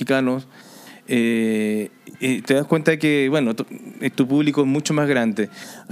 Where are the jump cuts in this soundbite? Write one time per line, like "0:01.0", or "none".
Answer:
none